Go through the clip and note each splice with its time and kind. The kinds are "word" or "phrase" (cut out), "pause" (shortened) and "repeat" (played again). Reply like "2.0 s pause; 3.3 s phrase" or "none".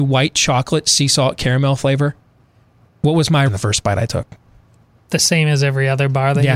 3.5 s word